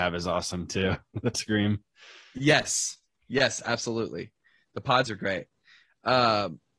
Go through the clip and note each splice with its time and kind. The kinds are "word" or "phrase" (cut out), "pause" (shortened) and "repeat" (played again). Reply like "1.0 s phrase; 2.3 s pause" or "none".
1.3 s word; 5.0 s word